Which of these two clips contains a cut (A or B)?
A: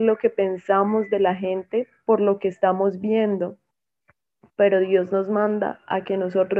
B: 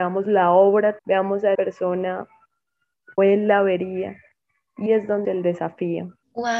B